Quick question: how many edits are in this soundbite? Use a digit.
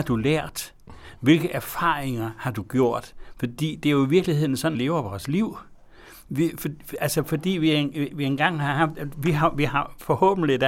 1